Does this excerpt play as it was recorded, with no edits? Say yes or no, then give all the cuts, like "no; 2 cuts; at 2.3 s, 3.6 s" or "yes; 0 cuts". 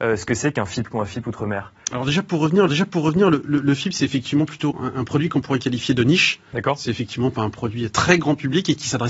no; 3 cuts; at 0.9 s, 2.7 s, 4.7 s